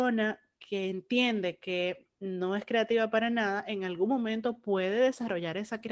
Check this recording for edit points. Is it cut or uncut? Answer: uncut